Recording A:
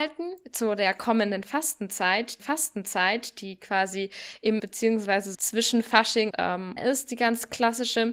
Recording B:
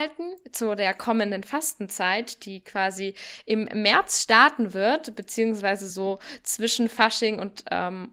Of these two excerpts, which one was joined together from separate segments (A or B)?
A